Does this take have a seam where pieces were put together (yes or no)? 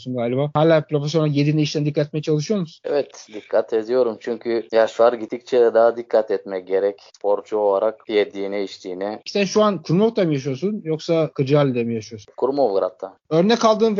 no